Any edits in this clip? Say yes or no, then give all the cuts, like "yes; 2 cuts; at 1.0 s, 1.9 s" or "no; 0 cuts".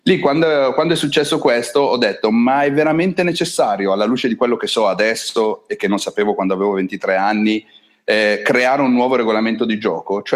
no; 0 cuts